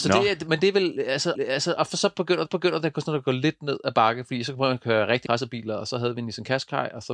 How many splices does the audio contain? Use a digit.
3